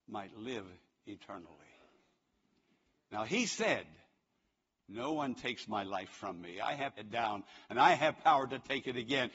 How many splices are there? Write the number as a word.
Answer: one